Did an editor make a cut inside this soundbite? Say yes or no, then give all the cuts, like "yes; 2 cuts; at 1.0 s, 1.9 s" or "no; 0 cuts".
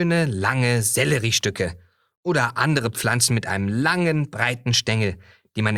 no; 0 cuts